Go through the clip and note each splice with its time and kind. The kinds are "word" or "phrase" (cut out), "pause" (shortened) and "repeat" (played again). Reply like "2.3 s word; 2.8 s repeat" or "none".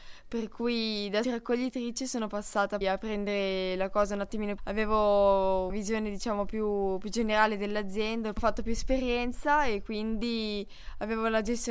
1.2 s word; 2.8 s word; 4.6 s phrase; 5.7 s word

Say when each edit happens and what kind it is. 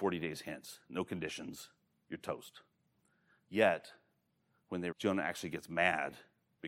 4.9 s word

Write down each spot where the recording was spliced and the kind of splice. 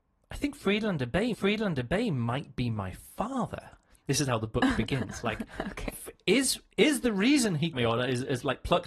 1.3 s repeat; 7.7 s phrase

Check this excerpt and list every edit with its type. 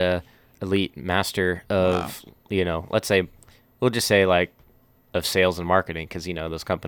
none

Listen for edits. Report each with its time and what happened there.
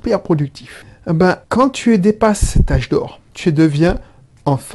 1.4 s pause; 3.3 s pause

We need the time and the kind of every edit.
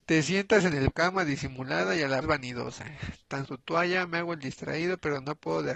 0.9 s phrase; 2.2 s word; 3.4 s phrase

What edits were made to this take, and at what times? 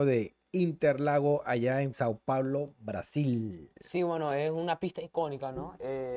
none

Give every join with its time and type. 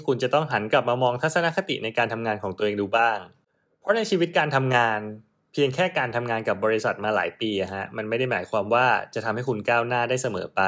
none

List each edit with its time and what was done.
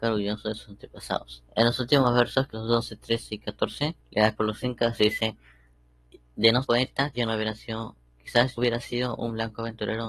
1.5 s pause; 2.5 s word; 4.0 s pause; 4.3 s phrase; 6.6 s word; 7.1 s word; 8.6 s word

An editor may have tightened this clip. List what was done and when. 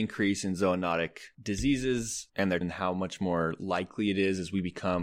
2.6 s word

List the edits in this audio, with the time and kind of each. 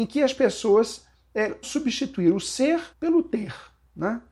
1.6 s word; 2.9 s pause

